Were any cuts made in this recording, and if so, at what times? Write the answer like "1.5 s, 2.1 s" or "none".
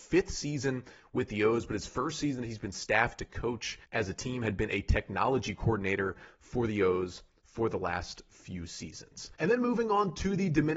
3.8 s, 9.3 s